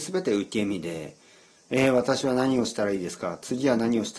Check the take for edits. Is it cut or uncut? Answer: uncut